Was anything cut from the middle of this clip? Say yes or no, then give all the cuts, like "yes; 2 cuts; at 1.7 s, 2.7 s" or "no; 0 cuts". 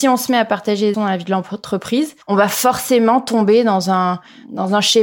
yes; 2 cuts; at 0.9 s, 2.2 s